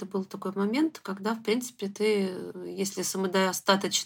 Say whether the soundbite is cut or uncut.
uncut